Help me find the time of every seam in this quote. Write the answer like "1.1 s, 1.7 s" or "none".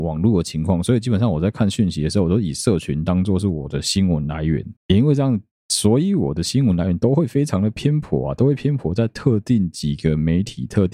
4.8 s